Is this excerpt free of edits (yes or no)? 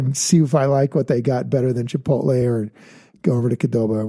yes